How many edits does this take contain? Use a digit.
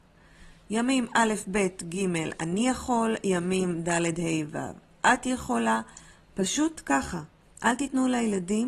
0